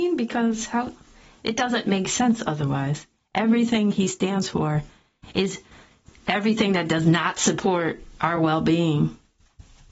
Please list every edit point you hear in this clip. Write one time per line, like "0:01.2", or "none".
none